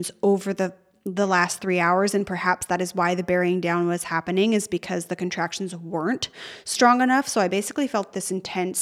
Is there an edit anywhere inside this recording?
no; 0 cuts

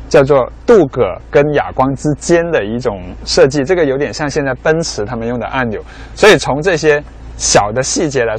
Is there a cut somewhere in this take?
no; 0 cuts

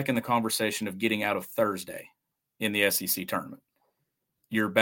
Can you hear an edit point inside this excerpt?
no; 0 cuts

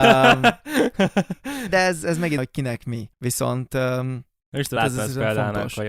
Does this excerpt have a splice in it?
yes; 5 cuts; at 1.7 s, 2.4 s, 3.1 s, 4.4 s, 4.8 s

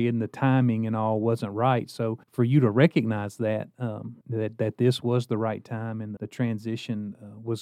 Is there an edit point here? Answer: yes; 3 cuts; at 2.2 s, 4.2 s, 6.2 s

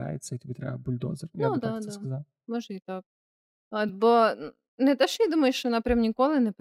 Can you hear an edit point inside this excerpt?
no; 0 cuts

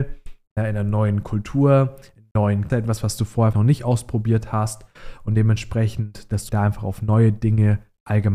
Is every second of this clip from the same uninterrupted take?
no; 3 cuts; at 2.7 s, 3.5 s, 6.5 s

